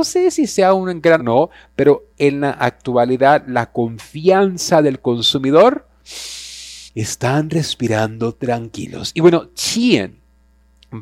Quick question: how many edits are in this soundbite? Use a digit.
3